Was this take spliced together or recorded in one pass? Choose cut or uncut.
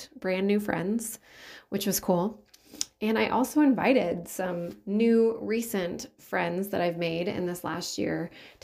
uncut